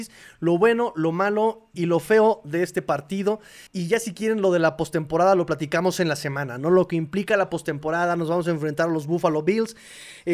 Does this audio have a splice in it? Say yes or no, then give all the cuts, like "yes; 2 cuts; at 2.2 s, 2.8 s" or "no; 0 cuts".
yes; 2 cuts; at 1.7 s, 3.7 s